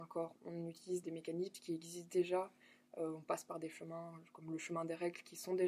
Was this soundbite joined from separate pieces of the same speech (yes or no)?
yes